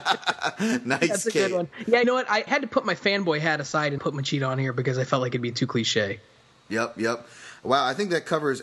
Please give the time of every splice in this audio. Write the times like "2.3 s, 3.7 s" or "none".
2.0 s, 2.5 s, 4.0 s